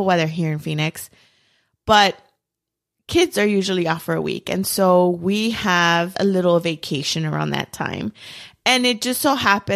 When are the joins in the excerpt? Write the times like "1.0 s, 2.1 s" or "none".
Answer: 6.1 s